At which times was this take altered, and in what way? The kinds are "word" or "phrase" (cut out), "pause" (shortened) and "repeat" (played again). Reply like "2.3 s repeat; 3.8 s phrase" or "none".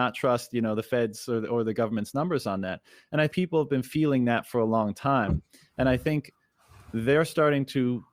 3.3 s word